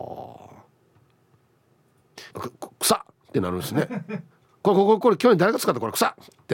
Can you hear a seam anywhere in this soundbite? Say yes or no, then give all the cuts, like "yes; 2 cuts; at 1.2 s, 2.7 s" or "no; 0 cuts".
yes; 1 cut; at 2.3 s